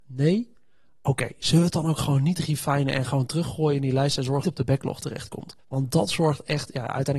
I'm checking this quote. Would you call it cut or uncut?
cut